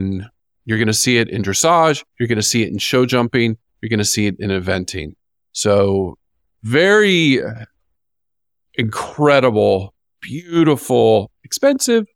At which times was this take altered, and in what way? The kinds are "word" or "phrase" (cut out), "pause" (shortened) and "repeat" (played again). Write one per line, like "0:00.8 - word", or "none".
0:02.1 - pause
0:05.2 - pause